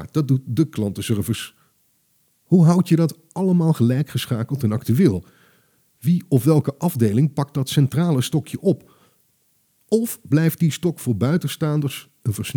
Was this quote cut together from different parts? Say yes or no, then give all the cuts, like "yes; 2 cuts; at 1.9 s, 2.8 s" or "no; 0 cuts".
no; 0 cuts